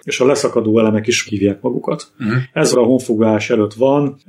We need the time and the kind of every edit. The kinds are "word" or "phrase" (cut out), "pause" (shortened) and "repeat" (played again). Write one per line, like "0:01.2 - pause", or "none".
0:01.3 - word
0:02.7 - word